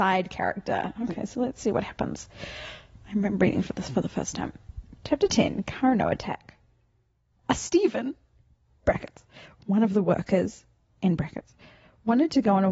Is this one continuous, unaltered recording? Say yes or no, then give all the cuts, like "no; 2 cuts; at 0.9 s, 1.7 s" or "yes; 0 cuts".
yes; 0 cuts